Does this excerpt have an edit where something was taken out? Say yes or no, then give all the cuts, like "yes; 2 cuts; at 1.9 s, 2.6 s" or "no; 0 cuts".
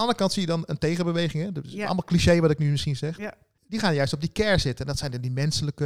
no; 0 cuts